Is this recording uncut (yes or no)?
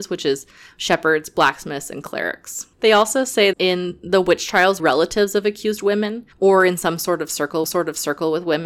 no